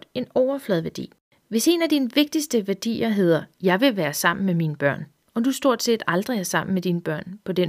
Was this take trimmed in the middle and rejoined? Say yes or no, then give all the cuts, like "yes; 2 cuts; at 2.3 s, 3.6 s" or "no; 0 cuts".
no; 0 cuts